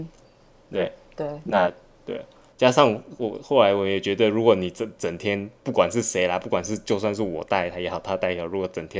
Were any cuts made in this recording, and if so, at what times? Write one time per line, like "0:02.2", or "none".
none